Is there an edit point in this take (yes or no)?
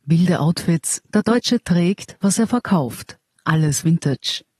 yes